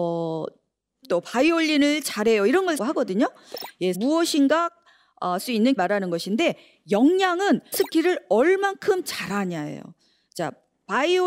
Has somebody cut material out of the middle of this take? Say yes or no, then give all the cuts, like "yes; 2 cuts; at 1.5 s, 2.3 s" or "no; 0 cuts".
yes; 6 cuts; at 1.0 s, 2.8 s, 3.9 s, 5.4 s, 5.8 s, 7.7 s